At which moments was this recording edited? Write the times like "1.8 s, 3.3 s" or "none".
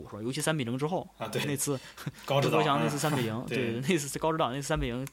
1.4 s